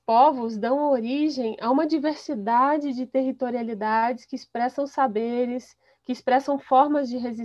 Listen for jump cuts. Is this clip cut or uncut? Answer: uncut